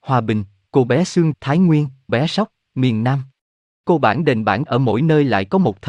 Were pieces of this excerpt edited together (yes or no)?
yes